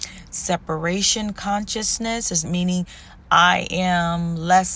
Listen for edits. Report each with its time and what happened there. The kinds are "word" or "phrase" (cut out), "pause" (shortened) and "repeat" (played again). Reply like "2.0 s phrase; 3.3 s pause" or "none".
2.4 s word; 3.2 s word